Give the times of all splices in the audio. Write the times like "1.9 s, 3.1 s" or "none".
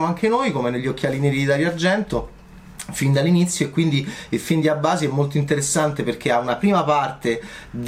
none